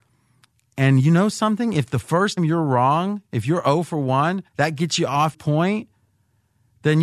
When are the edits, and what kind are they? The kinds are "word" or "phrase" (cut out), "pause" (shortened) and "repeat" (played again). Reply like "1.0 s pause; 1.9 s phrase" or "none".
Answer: 2.4 s word; 4.5 s pause; 5.3 s word